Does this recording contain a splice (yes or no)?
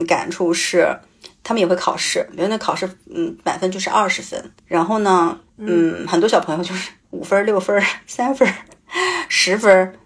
yes